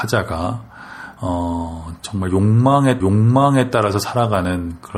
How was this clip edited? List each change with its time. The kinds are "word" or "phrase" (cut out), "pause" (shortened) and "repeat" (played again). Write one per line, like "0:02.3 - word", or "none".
0:02.0 - pause
0:03.0 - repeat